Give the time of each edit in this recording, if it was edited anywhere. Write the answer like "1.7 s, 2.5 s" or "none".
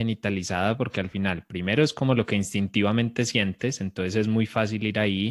none